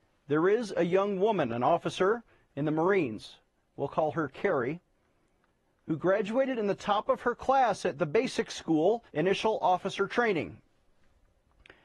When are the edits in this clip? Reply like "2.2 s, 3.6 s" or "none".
9.1 s